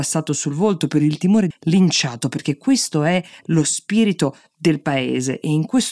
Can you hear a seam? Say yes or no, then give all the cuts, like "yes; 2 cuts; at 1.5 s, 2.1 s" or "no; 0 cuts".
yes; 1 cut; at 1.5 s